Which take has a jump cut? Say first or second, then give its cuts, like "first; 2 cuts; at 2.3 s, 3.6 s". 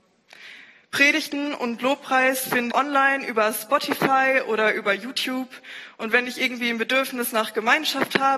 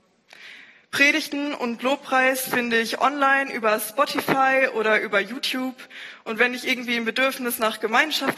first; 1 cut; at 2.7 s